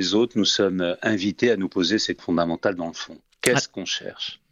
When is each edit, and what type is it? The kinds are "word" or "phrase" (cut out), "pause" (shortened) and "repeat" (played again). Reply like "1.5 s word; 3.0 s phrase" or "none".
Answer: 2.2 s word

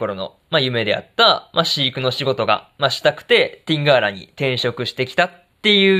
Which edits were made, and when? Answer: none

